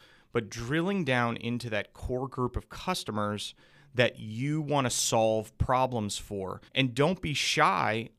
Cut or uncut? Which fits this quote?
cut